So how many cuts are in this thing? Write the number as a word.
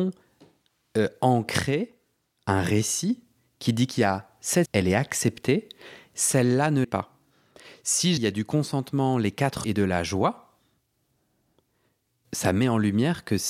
five